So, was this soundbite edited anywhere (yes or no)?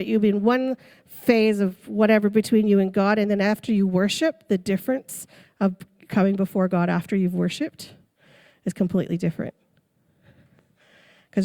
no